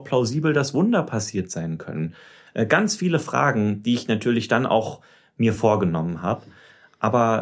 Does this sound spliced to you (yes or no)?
no